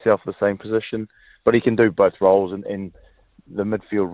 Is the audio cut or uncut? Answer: uncut